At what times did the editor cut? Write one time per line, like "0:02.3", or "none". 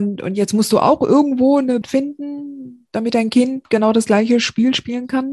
0:01.8